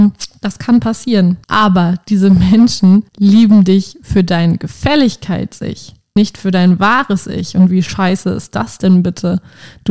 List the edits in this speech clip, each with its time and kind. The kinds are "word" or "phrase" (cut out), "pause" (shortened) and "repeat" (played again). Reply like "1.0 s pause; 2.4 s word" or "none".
1.4 s pause; 3.1 s pause; 6.2 s word